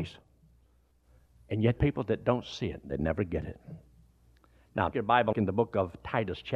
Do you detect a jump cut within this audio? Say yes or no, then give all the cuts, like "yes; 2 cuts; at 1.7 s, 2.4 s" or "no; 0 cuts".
yes; 3 cuts; at 1.8 s, 4.9 s, 5.3 s